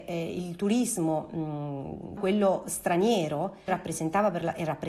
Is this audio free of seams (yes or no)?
no